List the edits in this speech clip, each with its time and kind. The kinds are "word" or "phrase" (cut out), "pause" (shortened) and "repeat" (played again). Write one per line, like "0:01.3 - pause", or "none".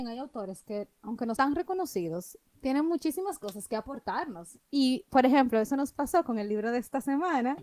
0:01.4 - word